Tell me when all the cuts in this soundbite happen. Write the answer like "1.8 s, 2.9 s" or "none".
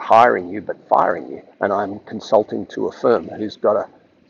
1.5 s